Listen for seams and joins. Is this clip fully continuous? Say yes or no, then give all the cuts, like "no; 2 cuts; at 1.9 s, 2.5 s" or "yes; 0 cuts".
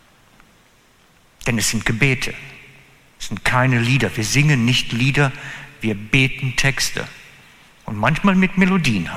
yes; 0 cuts